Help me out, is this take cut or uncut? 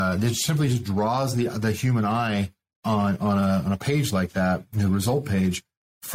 uncut